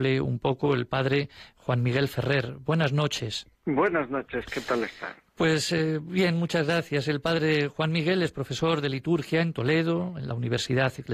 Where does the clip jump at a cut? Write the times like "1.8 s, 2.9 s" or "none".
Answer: 3.5 s